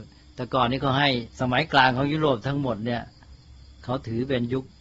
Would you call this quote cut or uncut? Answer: cut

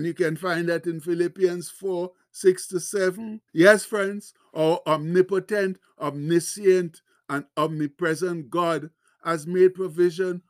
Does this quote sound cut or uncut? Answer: cut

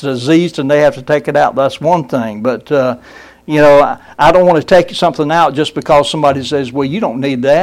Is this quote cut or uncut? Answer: uncut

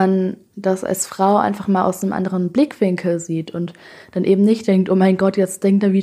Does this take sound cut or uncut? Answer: uncut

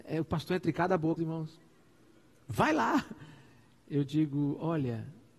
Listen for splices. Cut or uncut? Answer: cut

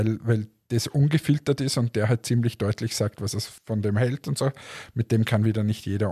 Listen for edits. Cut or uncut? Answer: cut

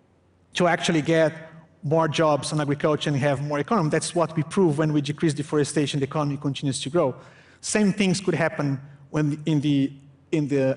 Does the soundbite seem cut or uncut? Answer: uncut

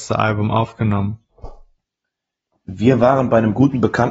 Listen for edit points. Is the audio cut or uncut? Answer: uncut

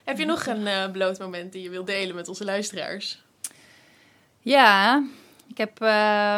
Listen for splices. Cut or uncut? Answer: uncut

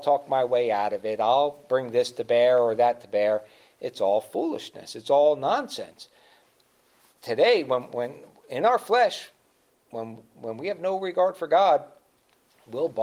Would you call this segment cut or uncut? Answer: uncut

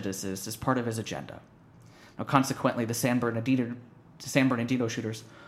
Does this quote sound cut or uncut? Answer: uncut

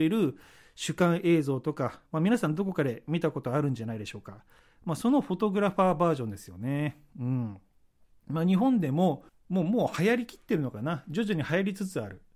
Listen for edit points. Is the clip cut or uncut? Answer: cut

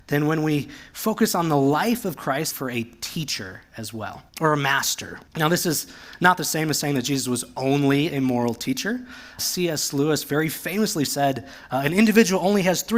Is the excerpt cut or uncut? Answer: cut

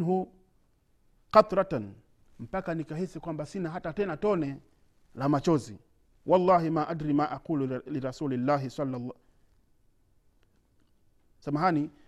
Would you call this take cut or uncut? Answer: uncut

